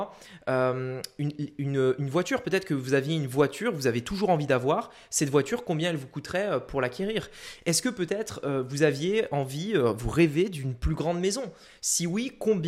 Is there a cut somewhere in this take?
no; 0 cuts

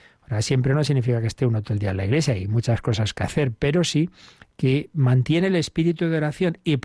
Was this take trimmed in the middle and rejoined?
no; 0 cuts

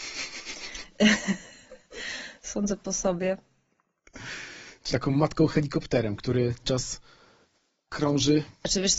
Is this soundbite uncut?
no; 2 cuts; at 4.9 s, 6.6 s

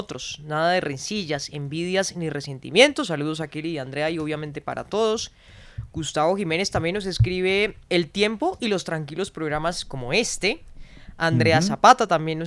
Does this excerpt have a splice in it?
yes; 1 cut; at 7.8 s

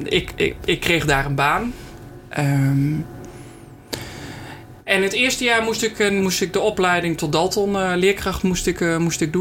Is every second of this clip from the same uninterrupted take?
no; 2 cuts; at 4.8 s, 6.2 s

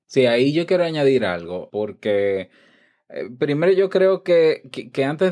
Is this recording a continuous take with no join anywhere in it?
no; 1 cut; at 1.7 s

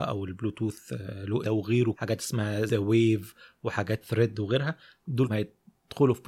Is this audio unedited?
no; 5 cuts; at 1.4 s, 1.9 s, 2.7 s, 4.0 s, 5.3 s

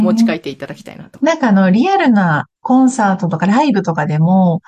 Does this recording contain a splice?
yes; 1 cut; at 2.6 s

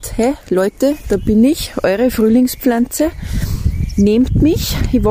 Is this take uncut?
yes; 0 cuts

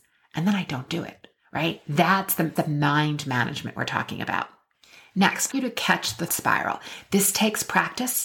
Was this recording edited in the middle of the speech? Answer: yes; 4 cuts; at 2.6 s, 4.7 s, 5.5 s, 6.3 s

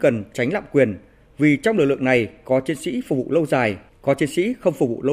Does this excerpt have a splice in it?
no; 0 cuts

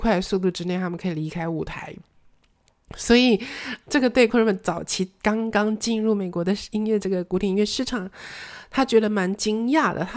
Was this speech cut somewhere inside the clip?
yes; 2 cuts; at 3.8 s, 4.3 s

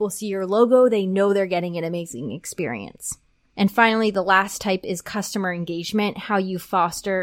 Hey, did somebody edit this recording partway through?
no; 0 cuts

